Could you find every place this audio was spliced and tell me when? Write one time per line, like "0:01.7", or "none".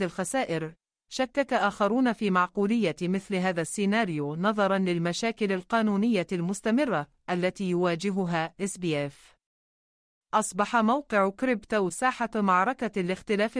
0:11.9